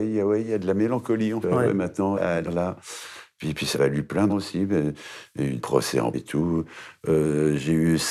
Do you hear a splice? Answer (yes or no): yes